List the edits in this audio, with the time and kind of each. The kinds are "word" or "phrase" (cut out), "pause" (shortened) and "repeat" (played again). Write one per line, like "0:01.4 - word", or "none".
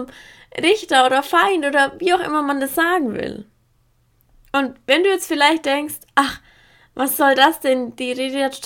none